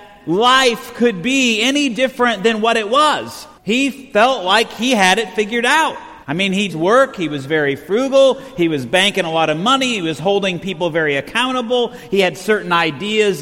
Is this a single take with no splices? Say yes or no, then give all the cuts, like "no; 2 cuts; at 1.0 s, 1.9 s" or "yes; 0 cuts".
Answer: no; 3 cuts; at 3.6 s, 6.2 s, 6.7 s